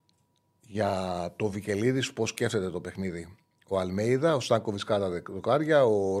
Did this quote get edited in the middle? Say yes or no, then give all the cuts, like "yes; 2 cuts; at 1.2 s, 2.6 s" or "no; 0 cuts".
no; 0 cuts